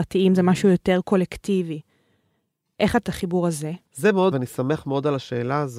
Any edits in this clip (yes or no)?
yes